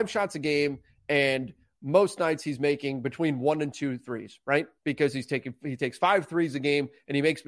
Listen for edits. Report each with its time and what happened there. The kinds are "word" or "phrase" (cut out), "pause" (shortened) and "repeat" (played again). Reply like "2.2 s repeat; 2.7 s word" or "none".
4.8 s pause